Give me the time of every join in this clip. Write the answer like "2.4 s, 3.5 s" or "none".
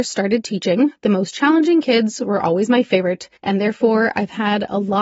3.4 s